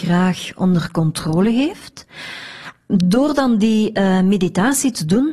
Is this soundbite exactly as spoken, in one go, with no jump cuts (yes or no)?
yes